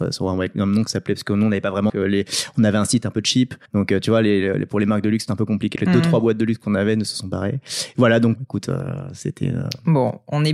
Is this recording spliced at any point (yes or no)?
yes